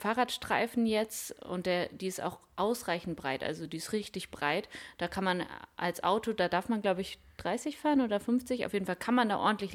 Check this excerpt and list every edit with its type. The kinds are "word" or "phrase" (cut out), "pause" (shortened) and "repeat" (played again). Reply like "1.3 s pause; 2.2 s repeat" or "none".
none